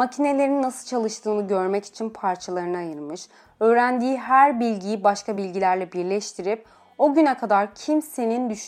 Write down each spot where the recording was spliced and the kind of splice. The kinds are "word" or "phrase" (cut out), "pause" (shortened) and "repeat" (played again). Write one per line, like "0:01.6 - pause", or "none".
none